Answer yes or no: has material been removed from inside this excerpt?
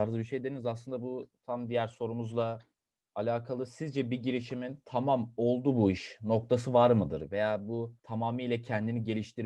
no